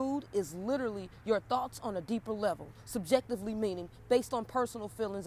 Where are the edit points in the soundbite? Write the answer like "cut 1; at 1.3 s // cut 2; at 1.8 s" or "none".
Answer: none